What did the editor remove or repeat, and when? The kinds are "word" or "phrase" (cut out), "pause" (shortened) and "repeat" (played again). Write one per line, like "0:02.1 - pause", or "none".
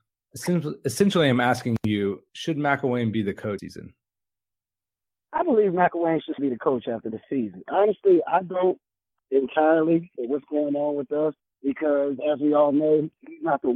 0:02.3 - pause
0:03.6 - phrase
0:06.4 - word
0:09.2 - phrase
0:11.5 - pause